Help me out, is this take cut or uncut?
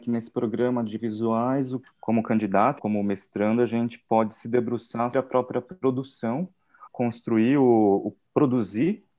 cut